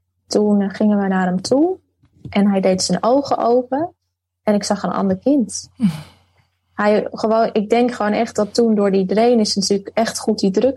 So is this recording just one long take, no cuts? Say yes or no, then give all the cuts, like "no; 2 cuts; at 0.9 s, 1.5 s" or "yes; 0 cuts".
yes; 0 cuts